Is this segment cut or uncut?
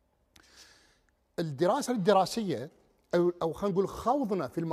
cut